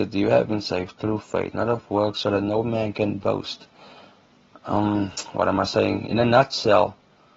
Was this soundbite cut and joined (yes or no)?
no